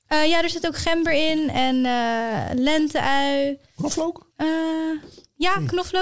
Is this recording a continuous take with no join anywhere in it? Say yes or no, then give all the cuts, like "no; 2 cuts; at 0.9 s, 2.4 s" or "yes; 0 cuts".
no; 1 cut; at 4.3 s